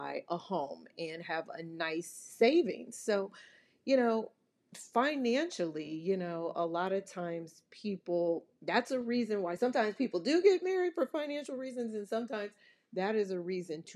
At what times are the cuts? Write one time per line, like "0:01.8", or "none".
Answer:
none